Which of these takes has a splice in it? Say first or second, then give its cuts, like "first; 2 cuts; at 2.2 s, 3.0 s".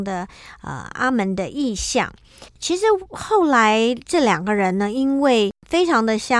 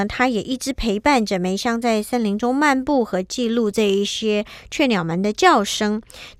first; 1 cut; at 2.5 s